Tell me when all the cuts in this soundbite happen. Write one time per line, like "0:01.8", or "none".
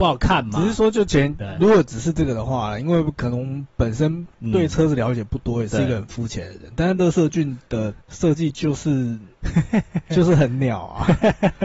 0:08.0